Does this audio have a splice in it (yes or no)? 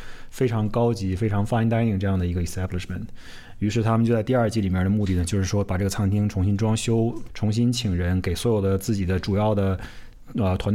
yes